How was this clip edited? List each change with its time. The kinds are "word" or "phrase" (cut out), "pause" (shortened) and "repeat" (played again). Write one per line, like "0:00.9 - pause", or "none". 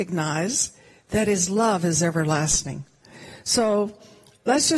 none

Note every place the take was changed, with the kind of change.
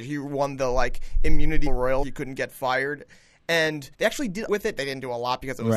0:01.7 - word
0:02.0 - phrase
0:03.9 - pause
0:04.5 - phrase

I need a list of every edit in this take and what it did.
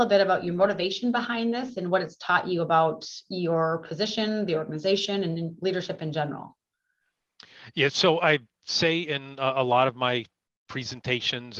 none

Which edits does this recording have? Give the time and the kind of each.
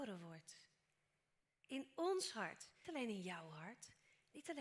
0:02.8 - word

